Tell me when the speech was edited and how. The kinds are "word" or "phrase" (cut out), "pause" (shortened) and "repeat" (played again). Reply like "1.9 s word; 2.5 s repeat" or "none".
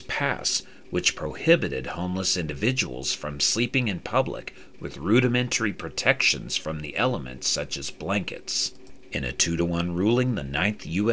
none